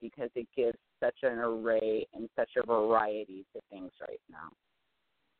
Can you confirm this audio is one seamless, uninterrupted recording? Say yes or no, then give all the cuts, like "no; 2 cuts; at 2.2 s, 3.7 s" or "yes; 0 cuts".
yes; 0 cuts